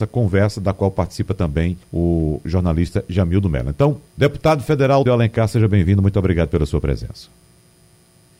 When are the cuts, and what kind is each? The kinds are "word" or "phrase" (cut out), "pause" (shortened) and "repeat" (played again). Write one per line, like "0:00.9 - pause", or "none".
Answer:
0:01.8 - pause
0:04.1 - pause
0:05.1 - word